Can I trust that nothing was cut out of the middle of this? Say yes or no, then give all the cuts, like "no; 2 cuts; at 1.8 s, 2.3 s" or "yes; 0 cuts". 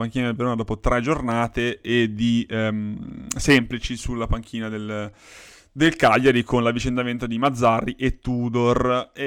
yes; 0 cuts